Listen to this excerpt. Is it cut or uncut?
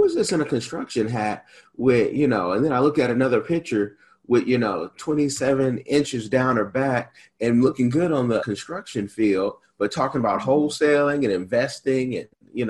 cut